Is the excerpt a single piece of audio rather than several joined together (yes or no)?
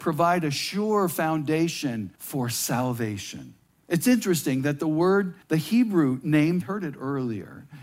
no